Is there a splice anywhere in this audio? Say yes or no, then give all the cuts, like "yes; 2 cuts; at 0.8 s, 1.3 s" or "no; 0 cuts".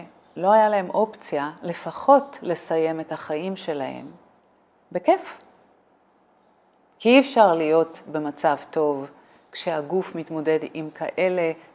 no; 0 cuts